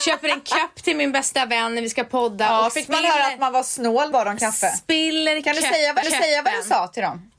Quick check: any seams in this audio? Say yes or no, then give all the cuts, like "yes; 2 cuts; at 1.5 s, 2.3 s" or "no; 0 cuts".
yes; 2 cuts; at 4.1 s, 6.0 s